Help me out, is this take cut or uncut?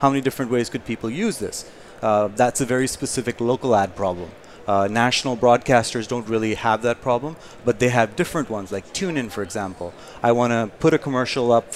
uncut